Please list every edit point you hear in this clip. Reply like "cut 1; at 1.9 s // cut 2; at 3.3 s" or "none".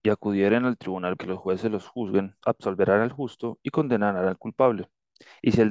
cut 1; at 1.2 s // cut 2; at 2.4 s